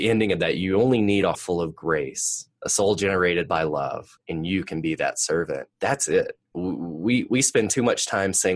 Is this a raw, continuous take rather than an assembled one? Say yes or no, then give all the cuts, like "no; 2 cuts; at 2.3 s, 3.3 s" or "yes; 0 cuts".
no; 4 cuts; at 1.3 s, 4.2 s, 5.7 s, 6.4 s